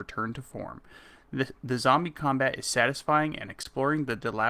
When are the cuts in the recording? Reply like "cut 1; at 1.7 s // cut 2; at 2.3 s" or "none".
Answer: none